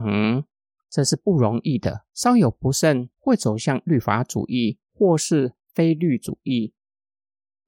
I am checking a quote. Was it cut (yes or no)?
yes